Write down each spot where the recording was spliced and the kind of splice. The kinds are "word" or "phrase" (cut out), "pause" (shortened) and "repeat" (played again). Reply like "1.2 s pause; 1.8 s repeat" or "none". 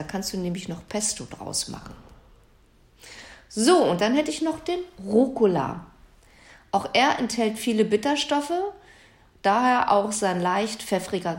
none